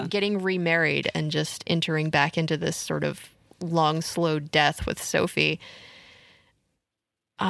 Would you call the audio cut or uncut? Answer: uncut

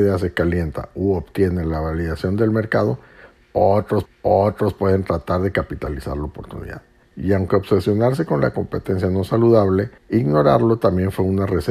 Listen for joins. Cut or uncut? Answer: cut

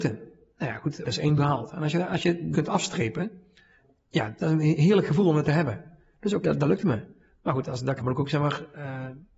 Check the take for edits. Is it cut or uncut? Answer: cut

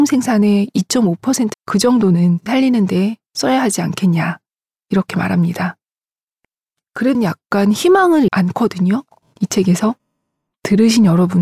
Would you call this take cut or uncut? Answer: cut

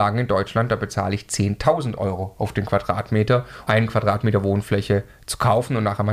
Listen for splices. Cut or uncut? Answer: cut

